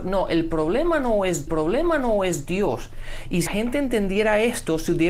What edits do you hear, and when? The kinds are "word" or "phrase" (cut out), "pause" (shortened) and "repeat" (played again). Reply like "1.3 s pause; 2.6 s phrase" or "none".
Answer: 1.5 s repeat; 3.5 s word

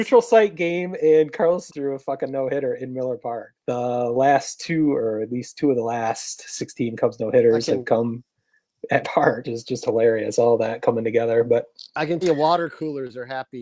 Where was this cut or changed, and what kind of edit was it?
1.7 s word; 3.5 s word; 9.0 s word; 9.4 s word; 12.2 s word

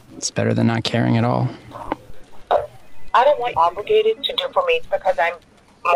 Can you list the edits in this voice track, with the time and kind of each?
3.5 s phrase; 4.5 s word; 4.8 s word

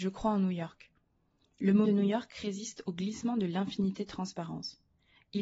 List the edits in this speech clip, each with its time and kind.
1.8 s word

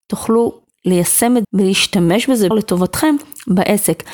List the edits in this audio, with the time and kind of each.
1.4 s word; 2.5 s word

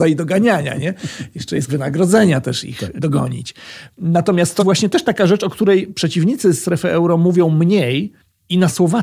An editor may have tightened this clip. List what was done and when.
1.7 s phrase; 4.6 s word

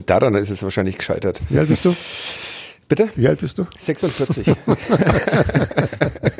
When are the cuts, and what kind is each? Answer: none

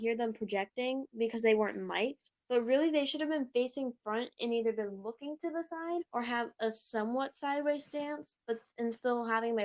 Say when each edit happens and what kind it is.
2.4 s pause; 6.1 s pause; 8.4 s pause

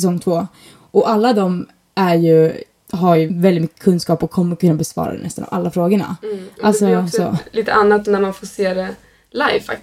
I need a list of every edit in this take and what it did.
3.3 s word; 8.0 s word

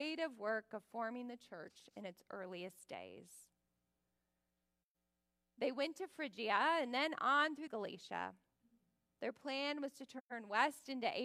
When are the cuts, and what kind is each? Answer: 7.7 s phrase

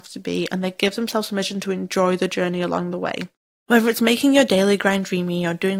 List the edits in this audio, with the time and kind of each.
none

